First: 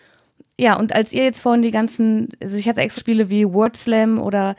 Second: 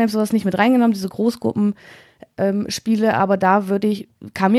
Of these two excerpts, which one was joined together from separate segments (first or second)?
first